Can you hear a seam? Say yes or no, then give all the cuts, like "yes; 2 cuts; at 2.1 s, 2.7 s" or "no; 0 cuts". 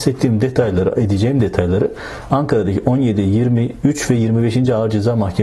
no; 0 cuts